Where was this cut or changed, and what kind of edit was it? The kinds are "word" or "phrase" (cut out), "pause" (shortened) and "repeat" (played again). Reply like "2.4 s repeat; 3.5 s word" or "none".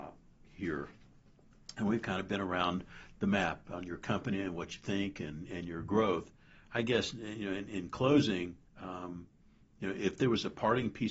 8.7 s pause